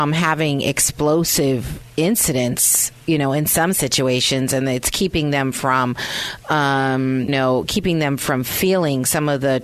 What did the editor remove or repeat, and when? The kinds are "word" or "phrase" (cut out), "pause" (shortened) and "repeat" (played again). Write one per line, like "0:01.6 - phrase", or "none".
0:07.3 - word